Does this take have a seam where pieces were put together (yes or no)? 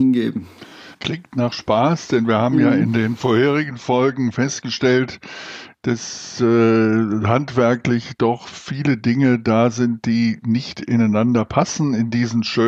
yes